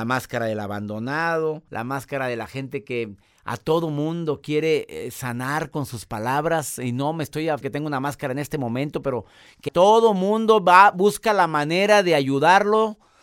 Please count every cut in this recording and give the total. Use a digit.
3